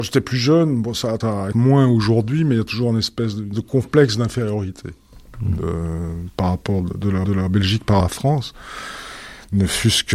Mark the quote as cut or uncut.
cut